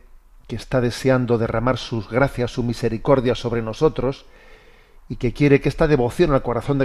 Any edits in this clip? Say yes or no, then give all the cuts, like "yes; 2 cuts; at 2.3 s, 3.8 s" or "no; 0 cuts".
no; 0 cuts